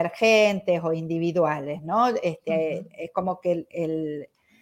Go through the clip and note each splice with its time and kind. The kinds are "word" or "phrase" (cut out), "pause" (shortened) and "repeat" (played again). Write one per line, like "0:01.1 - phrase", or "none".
none